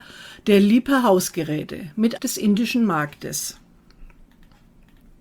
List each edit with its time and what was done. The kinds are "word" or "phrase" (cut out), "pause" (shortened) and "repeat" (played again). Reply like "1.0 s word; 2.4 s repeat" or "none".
2.2 s word